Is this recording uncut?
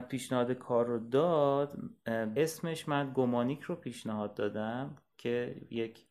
no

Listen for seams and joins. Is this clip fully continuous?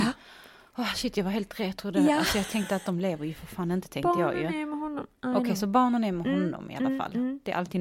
yes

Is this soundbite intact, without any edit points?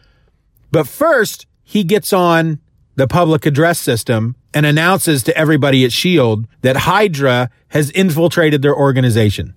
no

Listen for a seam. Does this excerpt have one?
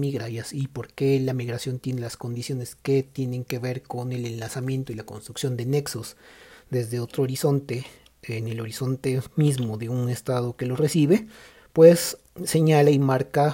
no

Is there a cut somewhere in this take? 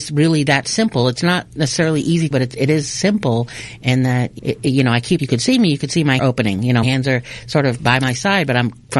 yes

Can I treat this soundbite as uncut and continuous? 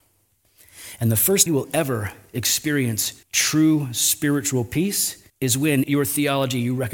no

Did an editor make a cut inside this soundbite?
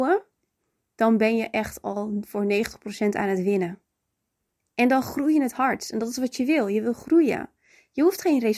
no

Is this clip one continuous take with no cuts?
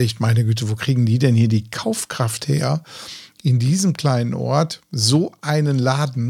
yes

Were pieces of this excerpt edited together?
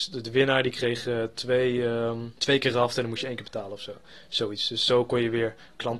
yes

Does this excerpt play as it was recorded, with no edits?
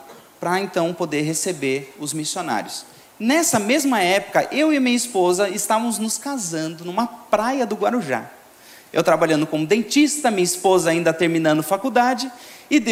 yes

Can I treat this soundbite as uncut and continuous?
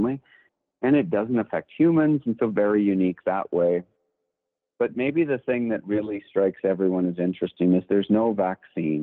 yes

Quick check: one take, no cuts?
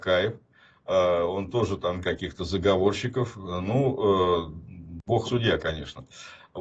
no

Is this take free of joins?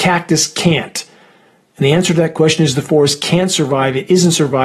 yes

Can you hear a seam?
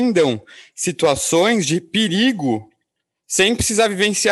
no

